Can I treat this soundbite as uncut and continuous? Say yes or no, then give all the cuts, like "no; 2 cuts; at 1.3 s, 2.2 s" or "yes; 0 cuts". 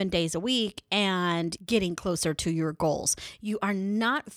no; 1 cut; at 1.6 s